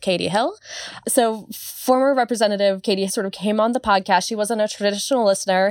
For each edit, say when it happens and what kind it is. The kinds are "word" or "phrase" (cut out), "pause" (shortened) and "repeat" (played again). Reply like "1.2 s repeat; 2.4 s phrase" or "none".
3.1 s word